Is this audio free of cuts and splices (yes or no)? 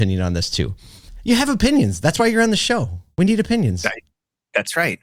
yes